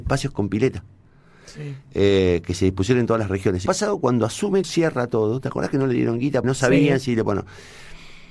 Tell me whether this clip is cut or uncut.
cut